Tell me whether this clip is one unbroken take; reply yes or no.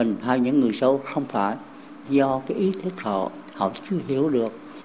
yes